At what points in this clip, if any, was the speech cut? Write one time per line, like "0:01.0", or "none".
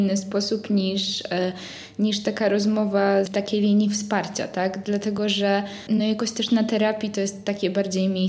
none